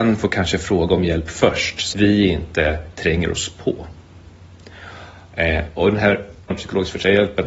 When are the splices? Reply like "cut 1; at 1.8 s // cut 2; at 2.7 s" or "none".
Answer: cut 1; at 1.9 s // cut 2; at 6.5 s